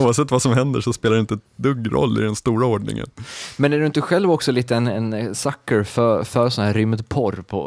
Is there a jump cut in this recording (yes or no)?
no